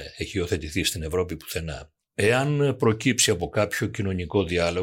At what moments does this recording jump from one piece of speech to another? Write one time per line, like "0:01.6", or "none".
none